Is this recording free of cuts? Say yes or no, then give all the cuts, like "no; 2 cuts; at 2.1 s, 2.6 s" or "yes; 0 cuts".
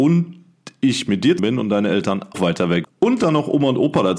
no; 3 cuts; at 1.4 s, 2.3 s, 2.8 s